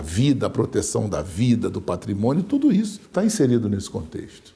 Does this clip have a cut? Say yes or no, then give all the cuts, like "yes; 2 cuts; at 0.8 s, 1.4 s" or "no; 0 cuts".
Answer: yes; 1 cut; at 3.0 s